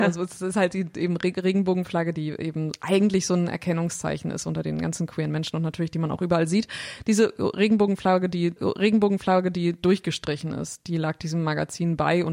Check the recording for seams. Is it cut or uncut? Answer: cut